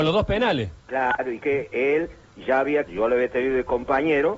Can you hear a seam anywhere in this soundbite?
yes; 2 cuts; at 1.4 s, 2.9 s

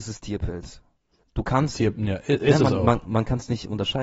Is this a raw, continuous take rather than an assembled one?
yes; 0 cuts

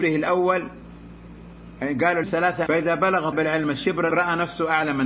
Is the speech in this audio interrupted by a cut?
yes; 4 cuts; at 2.2 s, 2.7 s, 3.3 s, 4.1 s

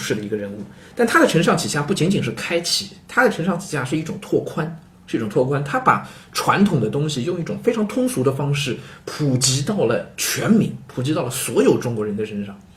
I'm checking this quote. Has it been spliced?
yes; 1 cut; at 4.9 s

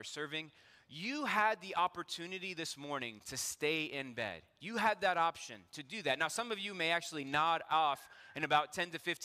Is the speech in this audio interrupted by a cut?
no; 0 cuts

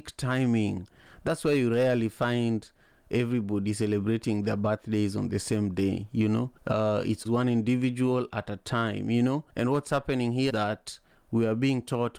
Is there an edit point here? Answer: yes; 4 cuts; at 6.6 s, 7.2 s, 9.5 s, 10.5 s

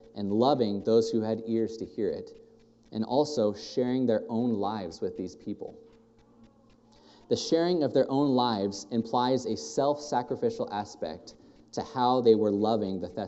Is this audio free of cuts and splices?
yes; 0 cuts

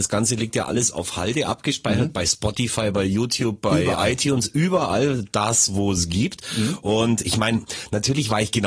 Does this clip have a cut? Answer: no; 0 cuts

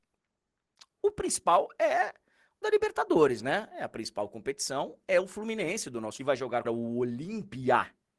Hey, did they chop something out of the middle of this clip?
yes; 4 cuts; at 0.9 s, 2.6 s, 6.2 s, 6.6 s

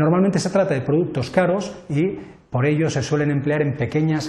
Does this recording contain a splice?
no; 0 cuts

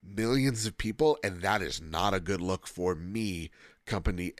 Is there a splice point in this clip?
no; 0 cuts

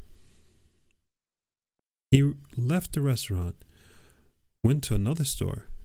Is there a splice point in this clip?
no; 0 cuts

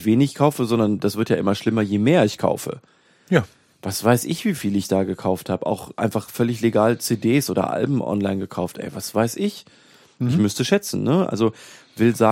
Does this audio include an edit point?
no; 0 cuts

